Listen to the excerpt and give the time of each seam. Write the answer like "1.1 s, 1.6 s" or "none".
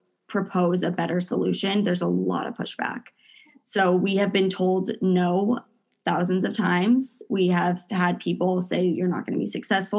none